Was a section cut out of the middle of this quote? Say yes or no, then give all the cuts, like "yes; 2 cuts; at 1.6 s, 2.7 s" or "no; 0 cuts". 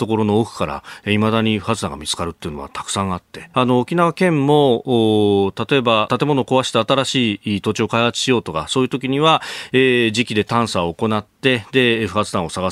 yes; 2 cuts; at 3.5 s, 6.1 s